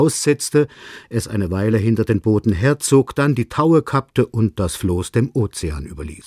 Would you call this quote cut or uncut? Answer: uncut